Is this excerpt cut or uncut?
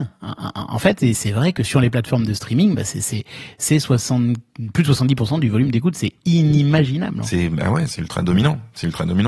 uncut